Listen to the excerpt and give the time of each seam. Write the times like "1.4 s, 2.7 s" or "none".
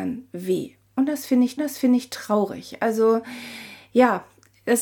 1.6 s